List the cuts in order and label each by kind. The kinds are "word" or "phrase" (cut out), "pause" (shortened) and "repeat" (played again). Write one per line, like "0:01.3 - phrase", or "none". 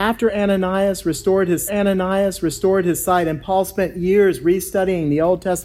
0:01.7 - repeat

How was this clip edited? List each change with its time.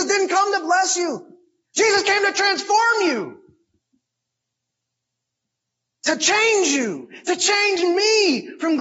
none

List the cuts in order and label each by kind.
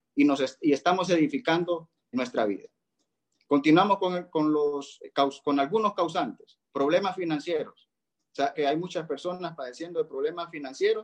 0:02.1 - word
0:08.5 - phrase

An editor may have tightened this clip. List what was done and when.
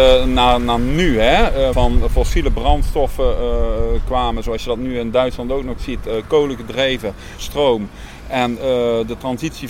0:01.7 - phrase
0:07.4 - phrase

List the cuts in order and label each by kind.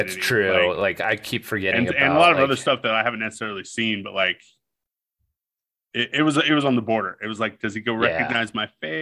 none

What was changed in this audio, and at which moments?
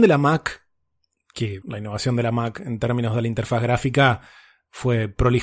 0:01.6 - word

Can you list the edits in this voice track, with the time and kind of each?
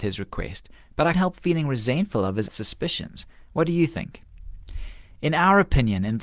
0:01.1 - word
0:02.5 - word

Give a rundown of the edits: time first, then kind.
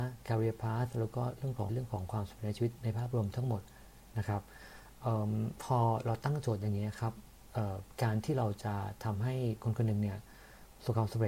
0:01.7 - word

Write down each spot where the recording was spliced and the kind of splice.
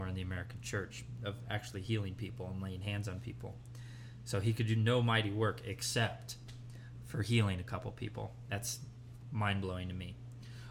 none

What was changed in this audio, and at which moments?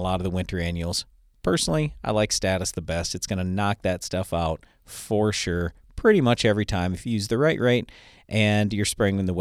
none

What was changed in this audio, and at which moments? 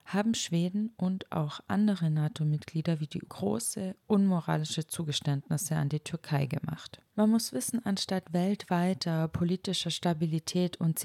0:03.2 - word
0:07.1 - pause

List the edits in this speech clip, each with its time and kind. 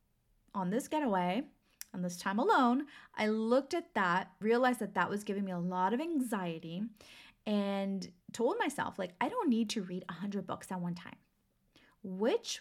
0:04.4 - word
0:08.2 - pause

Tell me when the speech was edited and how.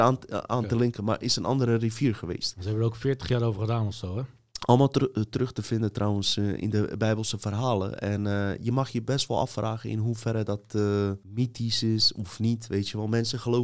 0:11.2 - pause

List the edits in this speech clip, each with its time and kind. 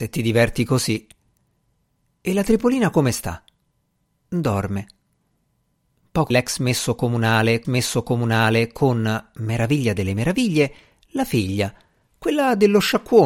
0:06.3 - phrase
0:07.6 - repeat

